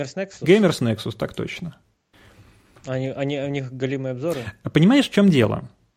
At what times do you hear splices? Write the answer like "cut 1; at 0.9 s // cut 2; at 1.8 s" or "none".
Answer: none

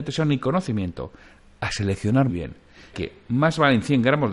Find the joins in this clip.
cut 1; at 2.3 s // cut 2; at 2.9 s

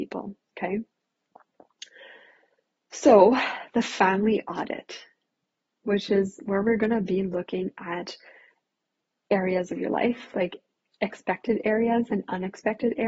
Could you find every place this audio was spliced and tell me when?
none

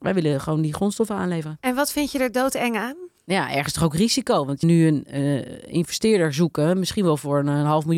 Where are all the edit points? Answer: cut 1; at 3.2 s // cut 2; at 4.6 s

